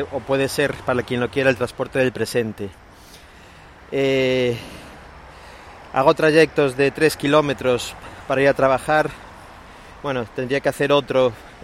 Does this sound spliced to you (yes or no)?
no